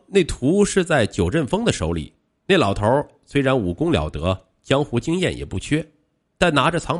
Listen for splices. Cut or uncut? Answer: uncut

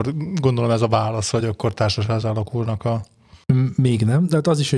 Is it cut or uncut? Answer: uncut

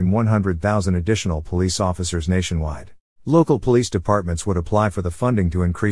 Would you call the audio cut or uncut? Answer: cut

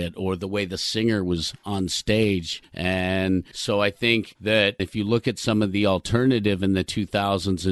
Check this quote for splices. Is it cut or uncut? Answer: uncut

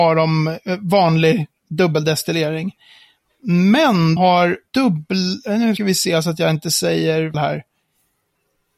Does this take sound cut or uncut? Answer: cut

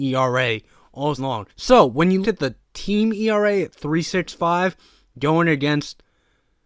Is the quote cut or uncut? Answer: cut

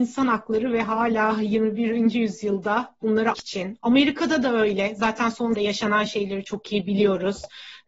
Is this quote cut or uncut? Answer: cut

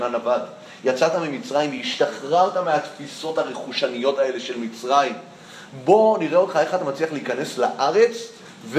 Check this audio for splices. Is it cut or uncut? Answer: uncut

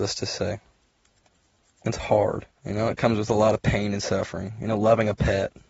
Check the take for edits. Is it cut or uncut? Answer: cut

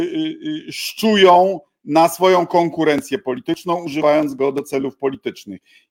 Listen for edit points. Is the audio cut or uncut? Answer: uncut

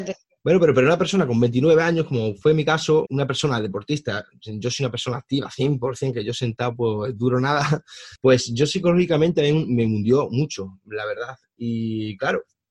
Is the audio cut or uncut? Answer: cut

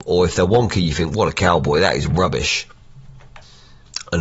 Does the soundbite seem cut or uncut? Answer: uncut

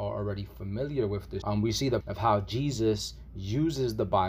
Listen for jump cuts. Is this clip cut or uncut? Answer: cut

